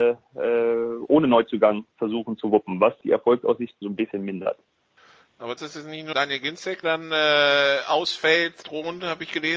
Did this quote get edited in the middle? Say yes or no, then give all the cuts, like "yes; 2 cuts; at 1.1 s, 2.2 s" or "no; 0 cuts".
yes; 6 cuts; at 3.0 s, 3.8 s, 5.6 s, 6.1 s, 6.8 s, 8.6 s